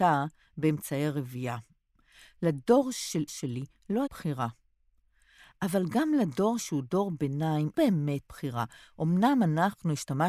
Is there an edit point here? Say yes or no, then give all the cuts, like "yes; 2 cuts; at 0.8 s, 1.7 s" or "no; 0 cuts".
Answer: yes; 5 cuts; at 3.3 s, 4.1 s, 6.6 s, 7.7 s, 8.2 s